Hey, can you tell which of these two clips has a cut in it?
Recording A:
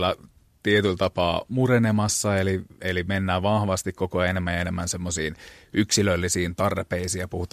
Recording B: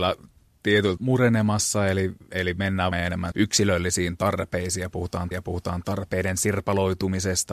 B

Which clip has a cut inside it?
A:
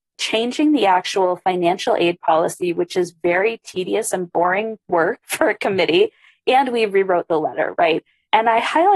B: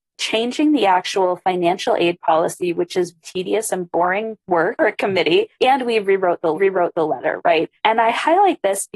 B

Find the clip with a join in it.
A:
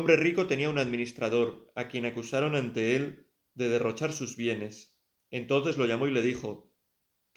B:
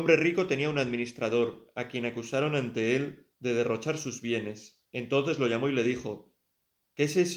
B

